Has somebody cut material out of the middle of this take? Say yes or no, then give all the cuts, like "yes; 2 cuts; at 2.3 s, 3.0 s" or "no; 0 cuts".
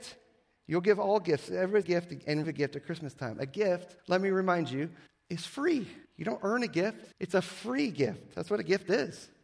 yes; 6 cuts; at 1.8 s, 2.4 s, 4.0 s, 5.1 s, 6.0 s, 7.1 s